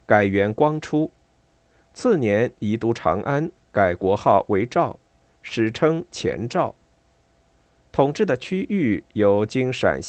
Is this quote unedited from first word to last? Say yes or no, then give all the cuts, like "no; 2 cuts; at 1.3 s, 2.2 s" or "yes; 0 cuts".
yes; 0 cuts